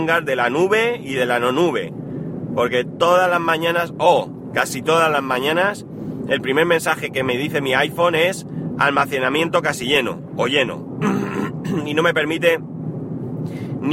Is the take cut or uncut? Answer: uncut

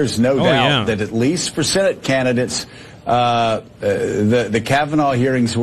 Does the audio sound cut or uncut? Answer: uncut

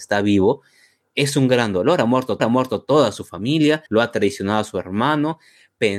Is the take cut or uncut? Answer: cut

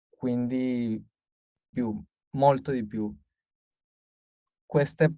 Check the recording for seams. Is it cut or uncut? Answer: cut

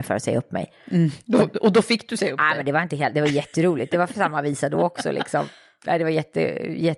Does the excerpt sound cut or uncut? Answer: uncut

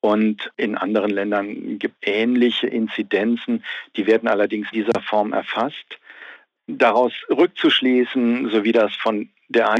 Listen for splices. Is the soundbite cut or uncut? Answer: cut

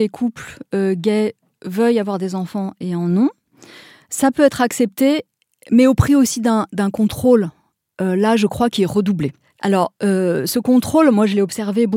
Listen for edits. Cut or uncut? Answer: uncut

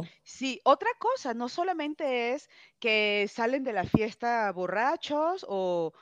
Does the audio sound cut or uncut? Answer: uncut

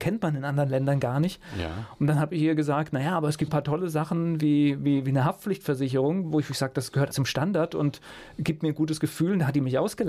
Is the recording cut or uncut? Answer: cut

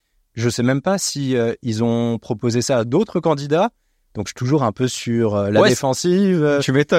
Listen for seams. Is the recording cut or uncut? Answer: uncut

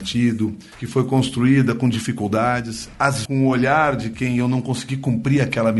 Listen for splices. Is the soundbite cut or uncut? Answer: cut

